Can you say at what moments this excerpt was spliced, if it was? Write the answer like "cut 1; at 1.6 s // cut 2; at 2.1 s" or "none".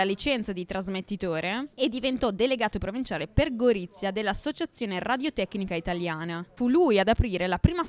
cut 1; at 1.7 s

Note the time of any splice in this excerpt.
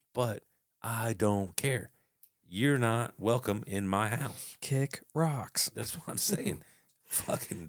none

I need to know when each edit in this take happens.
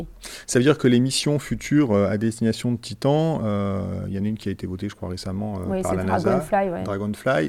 none

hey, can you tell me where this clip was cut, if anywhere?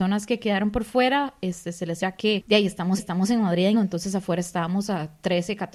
cut 1; at 2.0 s // cut 2; at 3.0 s // cut 3; at 3.7 s

